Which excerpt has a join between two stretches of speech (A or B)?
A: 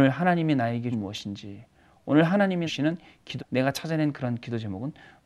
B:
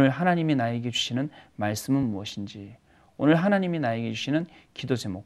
A